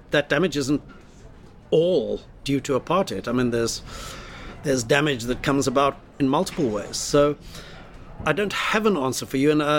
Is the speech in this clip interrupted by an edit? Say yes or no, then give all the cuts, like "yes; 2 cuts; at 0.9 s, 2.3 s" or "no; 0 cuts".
yes; 1 cut; at 6.2 s